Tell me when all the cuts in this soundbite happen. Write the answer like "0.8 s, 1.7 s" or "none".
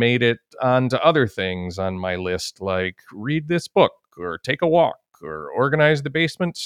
none